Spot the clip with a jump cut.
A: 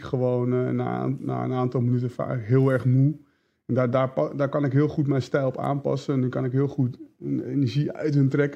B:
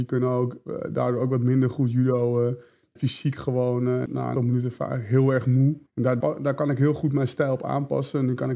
B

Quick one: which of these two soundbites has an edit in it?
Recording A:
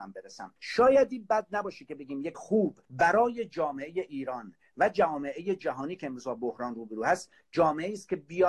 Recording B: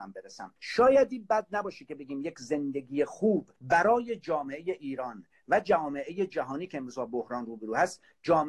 A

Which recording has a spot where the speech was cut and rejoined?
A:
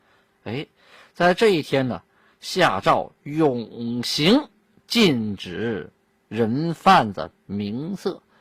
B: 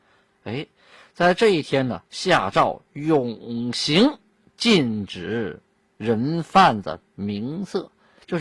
B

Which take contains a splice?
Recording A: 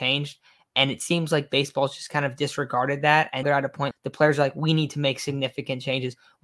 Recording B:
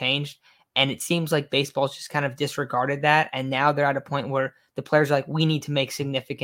A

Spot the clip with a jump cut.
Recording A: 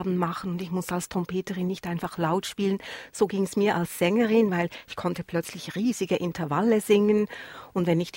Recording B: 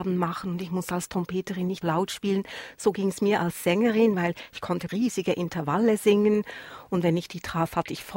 B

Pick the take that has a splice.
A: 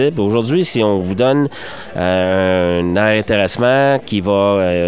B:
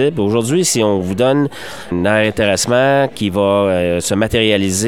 B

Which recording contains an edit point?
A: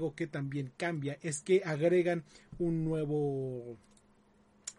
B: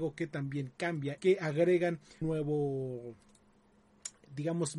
B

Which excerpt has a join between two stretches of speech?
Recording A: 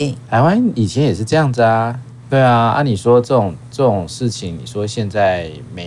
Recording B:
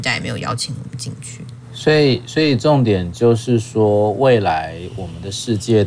A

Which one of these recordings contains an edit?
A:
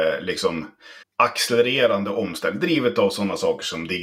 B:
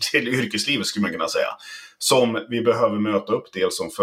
A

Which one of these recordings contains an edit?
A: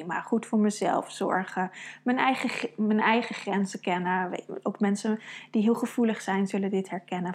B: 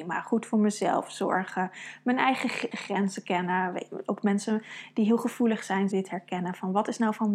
B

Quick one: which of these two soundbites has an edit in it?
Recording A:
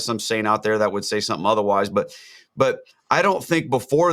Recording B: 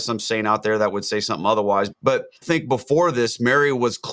B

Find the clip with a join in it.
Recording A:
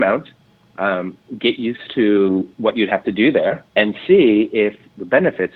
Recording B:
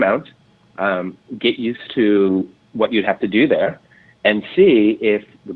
A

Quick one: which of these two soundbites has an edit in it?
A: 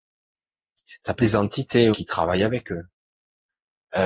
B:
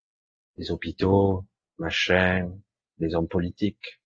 A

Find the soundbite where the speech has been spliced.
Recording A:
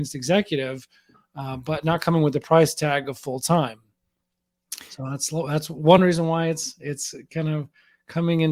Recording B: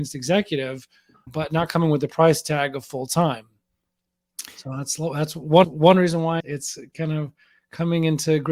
B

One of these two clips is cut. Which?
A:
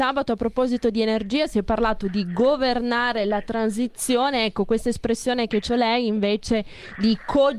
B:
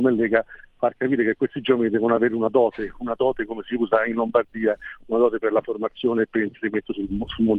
A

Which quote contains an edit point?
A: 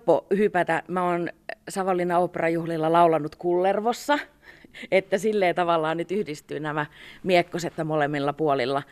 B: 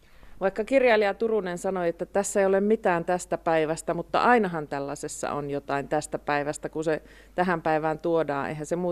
A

